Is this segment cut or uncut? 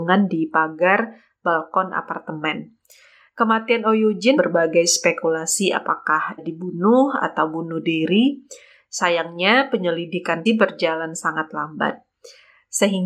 cut